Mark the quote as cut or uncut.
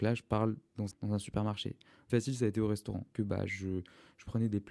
cut